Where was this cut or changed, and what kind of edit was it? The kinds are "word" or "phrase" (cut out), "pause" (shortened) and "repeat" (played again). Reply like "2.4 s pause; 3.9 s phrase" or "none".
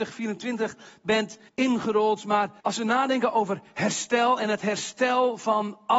1.5 s pause; 2.6 s pause